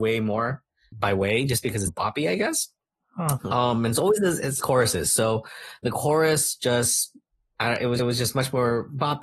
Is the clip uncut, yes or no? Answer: no